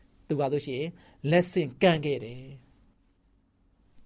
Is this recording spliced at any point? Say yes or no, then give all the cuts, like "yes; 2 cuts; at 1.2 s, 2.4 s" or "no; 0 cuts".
no; 0 cuts